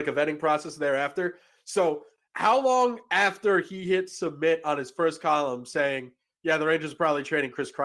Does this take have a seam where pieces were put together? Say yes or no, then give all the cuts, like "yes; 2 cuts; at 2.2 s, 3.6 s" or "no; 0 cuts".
no; 0 cuts